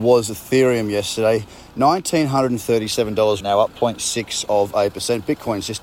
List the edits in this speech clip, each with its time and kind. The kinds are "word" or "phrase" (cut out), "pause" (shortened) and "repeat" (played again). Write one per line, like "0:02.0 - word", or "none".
0:03.4 - word